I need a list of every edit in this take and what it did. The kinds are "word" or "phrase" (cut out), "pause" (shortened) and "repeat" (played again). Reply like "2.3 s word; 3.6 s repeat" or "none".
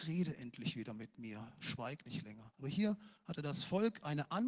2.5 s pause; 3.2 s pause